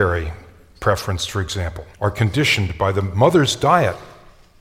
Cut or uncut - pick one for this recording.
cut